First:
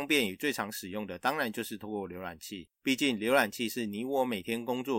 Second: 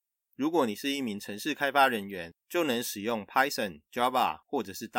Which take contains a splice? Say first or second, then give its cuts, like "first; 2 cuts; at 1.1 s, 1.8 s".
first; 1 cut; at 2.7 s